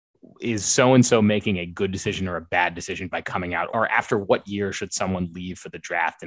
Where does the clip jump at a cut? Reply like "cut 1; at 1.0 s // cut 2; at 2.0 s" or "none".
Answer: cut 1; at 3.7 s